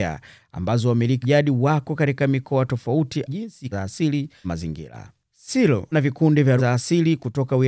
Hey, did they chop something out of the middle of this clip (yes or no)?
yes